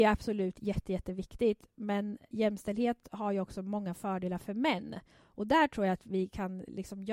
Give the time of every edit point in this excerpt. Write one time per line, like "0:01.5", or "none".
0:02.3